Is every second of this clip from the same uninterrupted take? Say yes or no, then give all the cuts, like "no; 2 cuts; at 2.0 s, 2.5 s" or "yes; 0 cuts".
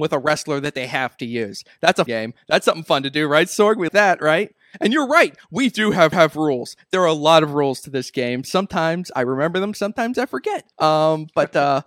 no; 4 cuts; at 2.1 s, 3.9 s, 6.1 s, 10.7 s